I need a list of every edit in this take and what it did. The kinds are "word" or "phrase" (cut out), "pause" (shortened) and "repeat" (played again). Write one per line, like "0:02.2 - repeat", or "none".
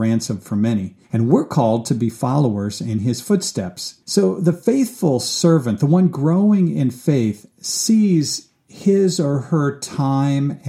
0:01.0 - pause
0:04.0 - pause